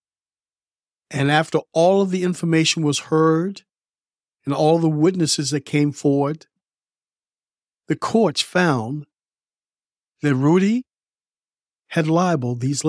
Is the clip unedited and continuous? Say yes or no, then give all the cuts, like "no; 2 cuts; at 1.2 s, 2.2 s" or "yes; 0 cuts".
yes; 0 cuts